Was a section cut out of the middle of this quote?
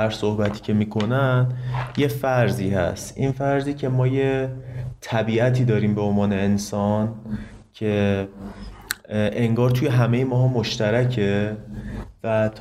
no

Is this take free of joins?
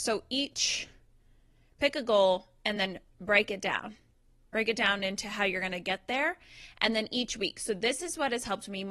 yes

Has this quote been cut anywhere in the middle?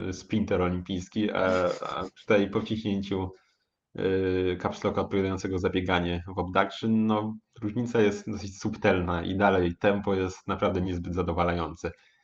no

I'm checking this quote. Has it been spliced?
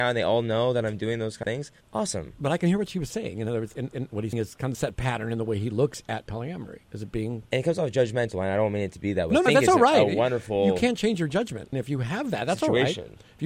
yes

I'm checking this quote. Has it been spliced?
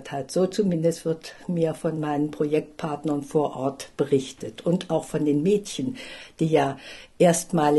no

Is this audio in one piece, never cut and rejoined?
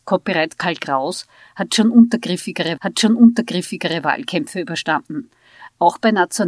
no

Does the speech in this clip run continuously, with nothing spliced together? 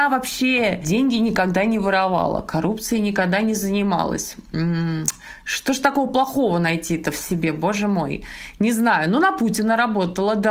yes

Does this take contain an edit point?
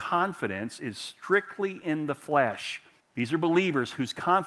yes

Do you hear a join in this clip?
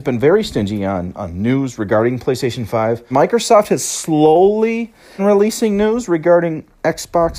yes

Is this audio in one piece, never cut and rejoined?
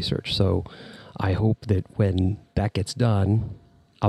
yes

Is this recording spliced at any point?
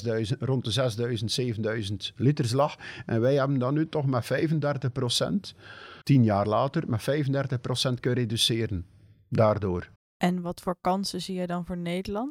yes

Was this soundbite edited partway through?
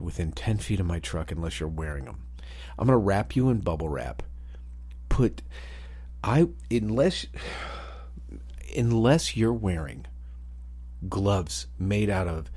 no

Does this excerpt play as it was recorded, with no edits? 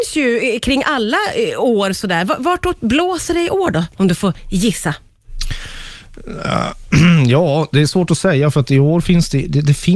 yes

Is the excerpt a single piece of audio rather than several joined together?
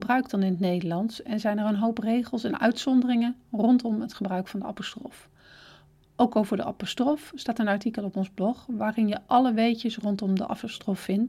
yes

